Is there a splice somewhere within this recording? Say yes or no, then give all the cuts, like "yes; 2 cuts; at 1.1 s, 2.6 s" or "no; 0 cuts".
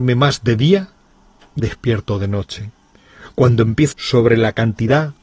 yes; 2 cuts; at 1.6 s, 3.9 s